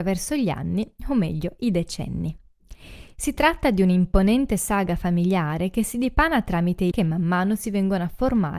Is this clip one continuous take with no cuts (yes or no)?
no